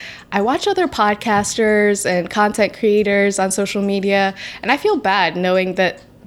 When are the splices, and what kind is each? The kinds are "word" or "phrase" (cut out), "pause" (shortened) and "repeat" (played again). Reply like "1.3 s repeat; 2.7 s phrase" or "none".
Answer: none